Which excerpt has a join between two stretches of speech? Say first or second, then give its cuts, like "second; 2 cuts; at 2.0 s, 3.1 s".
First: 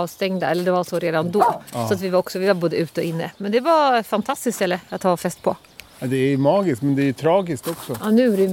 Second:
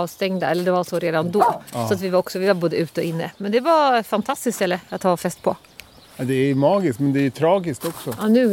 first; 1 cut; at 5.9 s